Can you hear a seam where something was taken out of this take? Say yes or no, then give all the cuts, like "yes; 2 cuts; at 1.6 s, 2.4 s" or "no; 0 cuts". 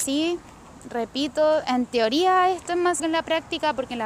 yes; 1 cut; at 3.0 s